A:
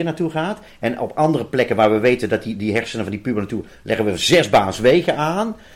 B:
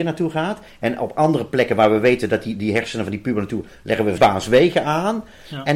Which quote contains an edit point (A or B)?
B